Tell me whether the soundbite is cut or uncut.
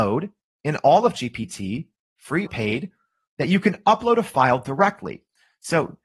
cut